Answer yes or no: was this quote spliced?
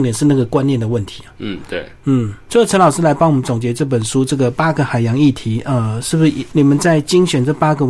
no